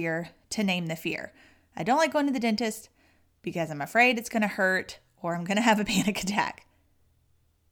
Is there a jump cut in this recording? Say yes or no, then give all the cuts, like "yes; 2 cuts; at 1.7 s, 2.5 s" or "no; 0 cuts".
no; 0 cuts